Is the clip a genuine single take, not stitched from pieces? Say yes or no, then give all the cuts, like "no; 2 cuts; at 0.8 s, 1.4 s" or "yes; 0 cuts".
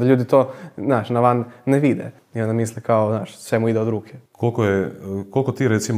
no; 2 cuts; at 2.2 s, 4.3 s